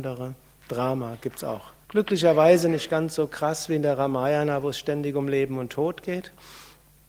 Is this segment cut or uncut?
cut